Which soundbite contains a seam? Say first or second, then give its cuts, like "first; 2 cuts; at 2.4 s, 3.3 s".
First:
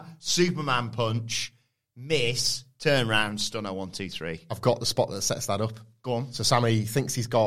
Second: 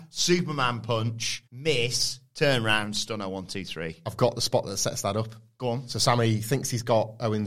second; 1 cut; at 1.5 s